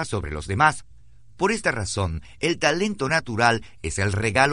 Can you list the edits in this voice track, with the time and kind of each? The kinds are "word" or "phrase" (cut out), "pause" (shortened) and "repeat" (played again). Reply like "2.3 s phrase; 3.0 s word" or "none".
none